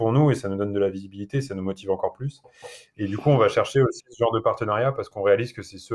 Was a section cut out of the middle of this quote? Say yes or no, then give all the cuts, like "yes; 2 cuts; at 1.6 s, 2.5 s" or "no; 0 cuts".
no; 0 cuts